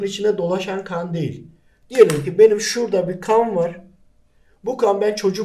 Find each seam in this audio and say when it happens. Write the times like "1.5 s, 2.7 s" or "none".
none

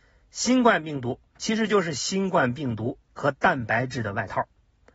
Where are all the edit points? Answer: 3.0 s

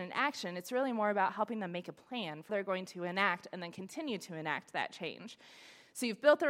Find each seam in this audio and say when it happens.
2.5 s

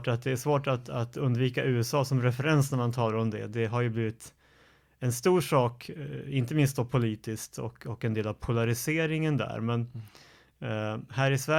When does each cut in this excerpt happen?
none

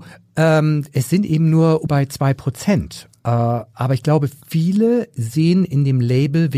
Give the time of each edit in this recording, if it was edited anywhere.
1.9 s

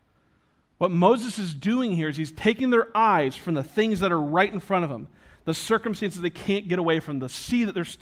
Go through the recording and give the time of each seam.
none

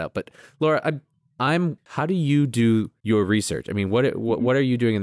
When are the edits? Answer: 1.8 s

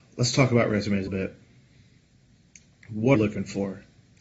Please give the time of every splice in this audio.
1.1 s, 3.2 s

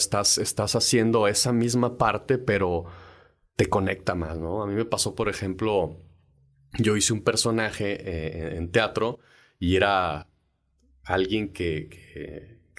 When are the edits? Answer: none

